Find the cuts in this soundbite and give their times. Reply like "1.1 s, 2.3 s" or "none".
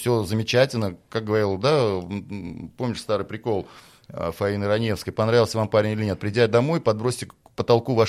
none